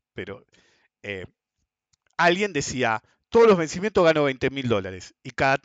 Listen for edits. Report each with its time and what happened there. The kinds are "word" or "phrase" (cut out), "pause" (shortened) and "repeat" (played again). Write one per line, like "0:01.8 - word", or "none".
none